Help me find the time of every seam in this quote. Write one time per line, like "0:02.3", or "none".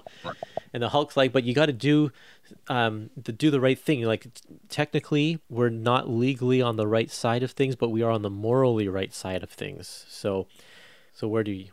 none